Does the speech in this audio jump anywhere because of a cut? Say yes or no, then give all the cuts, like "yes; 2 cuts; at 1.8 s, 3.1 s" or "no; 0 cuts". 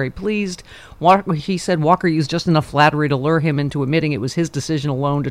no; 0 cuts